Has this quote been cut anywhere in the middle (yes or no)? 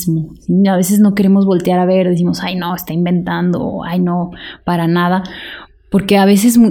no